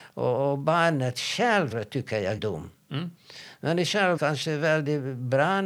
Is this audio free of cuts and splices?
no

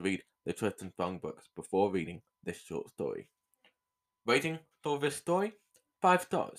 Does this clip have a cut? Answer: no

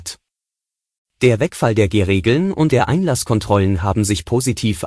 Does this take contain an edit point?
yes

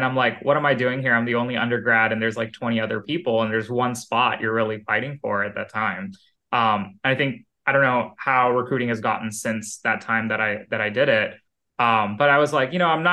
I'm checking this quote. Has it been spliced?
no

